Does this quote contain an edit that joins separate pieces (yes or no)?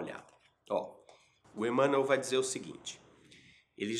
no